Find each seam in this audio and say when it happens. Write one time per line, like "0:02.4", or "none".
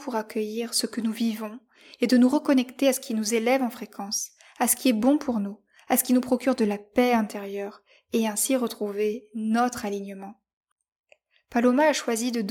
none